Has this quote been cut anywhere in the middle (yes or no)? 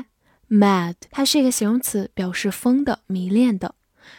yes